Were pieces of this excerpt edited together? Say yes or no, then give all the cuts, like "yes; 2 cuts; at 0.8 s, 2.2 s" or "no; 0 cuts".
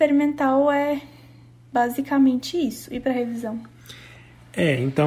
no; 0 cuts